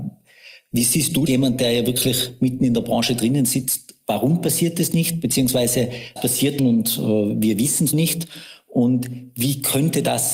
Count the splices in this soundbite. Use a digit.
4